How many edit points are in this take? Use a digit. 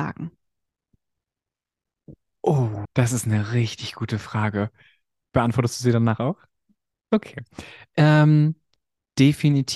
1